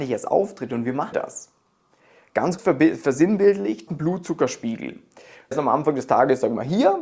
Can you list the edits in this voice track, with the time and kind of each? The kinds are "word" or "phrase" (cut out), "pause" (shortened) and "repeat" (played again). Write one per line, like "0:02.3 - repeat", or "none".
0:01.1 - word
0:02.6 - word
0:03.9 - word
0:05.5 - word